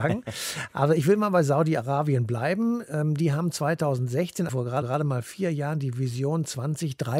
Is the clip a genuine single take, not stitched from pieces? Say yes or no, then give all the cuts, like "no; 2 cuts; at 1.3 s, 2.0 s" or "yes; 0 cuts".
no; 2 cuts; at 4.5 s, 4.8 s